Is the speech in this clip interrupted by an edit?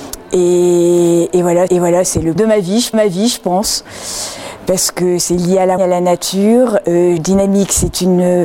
yes; 5 cuts; at 1.7 s, 2.4 s, 2.9 s, 5.8 s, 7.2 s

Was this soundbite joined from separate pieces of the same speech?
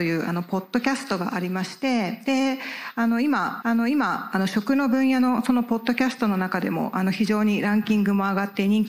yes; 1 cut; at 3.6 s

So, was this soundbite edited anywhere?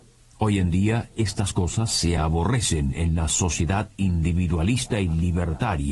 no; 0 cuts

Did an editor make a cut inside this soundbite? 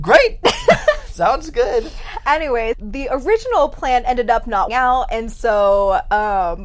yes; 2 cuts; at 2.7 s, 4.7 s

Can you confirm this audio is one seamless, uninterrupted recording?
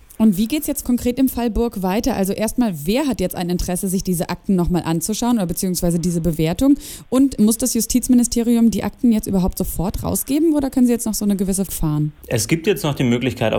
no; 1 cut; at 11.7 s

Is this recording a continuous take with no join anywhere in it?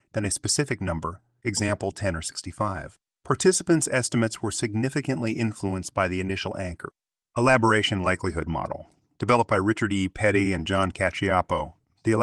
yes; 0 cuts

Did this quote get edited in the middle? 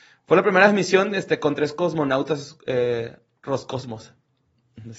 no; 0 cuts

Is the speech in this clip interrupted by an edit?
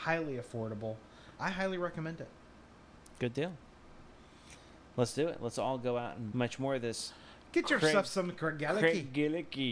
yes; 2 cuts; at 1.4 s, 6.3 s

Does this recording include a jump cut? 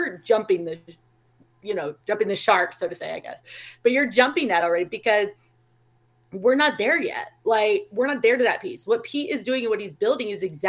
no; 0 cuts

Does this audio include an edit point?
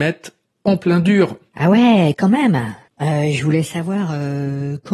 yes; 1 cut; at 2.9 s

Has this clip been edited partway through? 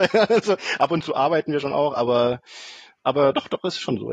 no; 0 cuts

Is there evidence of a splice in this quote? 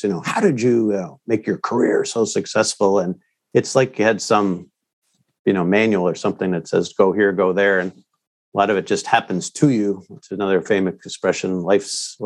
no; 0 cuts

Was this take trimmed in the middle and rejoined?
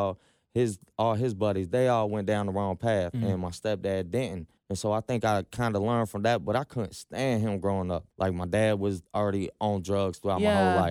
yes; 3 cuts; at 4.6 s, 8.1 s, 9.1 s

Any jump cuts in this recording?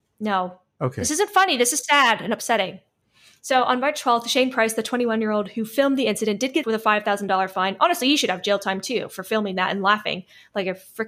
yes; 2 cuts; at 3.0 s, 6.6 s

